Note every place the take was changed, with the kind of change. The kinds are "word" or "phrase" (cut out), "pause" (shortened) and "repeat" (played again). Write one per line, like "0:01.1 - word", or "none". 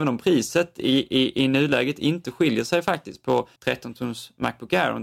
0:03.6 - pause

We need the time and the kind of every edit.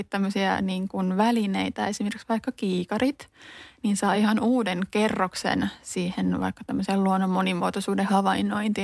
none

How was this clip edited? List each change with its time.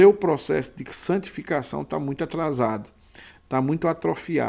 none

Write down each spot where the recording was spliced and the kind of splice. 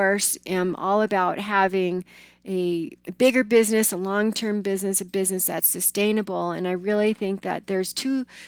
0:03.0 - pause

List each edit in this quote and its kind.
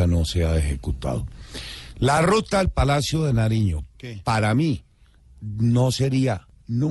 none

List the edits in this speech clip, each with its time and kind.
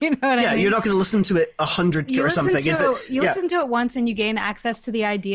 0:02.1 - phrase

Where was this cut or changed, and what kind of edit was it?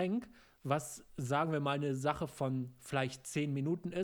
none

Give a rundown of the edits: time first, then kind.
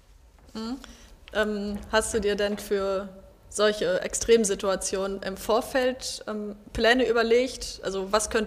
none

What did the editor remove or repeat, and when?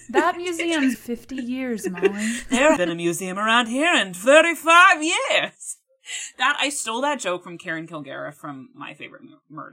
0:00.9 - phrase
0:02.8 - word

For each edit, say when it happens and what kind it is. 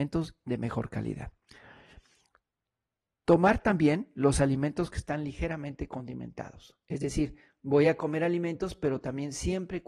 none

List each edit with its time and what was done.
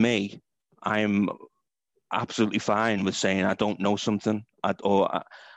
none

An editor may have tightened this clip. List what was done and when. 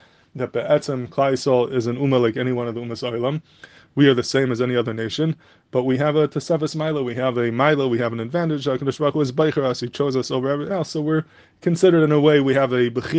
0:10.7 - word

